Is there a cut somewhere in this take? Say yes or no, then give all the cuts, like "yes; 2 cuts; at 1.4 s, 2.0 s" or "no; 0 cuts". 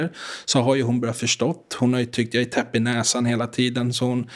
no; 0 cuts